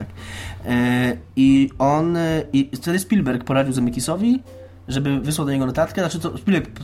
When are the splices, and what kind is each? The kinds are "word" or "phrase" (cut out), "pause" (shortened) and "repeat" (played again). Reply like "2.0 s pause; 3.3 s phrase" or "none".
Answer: none